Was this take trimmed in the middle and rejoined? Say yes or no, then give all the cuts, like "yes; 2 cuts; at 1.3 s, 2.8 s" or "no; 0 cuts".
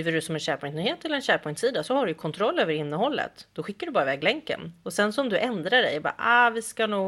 no; 0 cuts